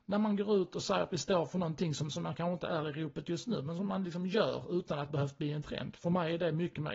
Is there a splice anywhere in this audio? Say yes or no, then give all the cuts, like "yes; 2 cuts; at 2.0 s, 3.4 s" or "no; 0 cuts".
yes; 1 cut; at 5.1 s